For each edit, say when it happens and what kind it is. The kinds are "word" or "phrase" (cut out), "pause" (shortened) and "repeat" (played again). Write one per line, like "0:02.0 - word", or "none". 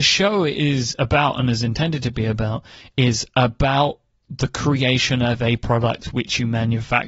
none